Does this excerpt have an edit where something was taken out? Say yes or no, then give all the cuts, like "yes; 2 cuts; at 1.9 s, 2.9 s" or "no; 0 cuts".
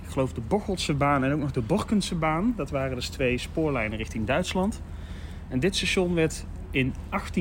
no; 0 cuts